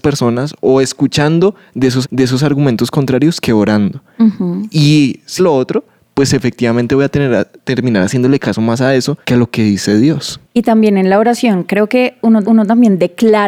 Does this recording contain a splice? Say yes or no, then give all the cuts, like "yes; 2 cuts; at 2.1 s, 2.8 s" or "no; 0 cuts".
yes; 5 cuts; at 2.0 s, 5.4 s, 9.2 s, 10.4 s, 12.4 s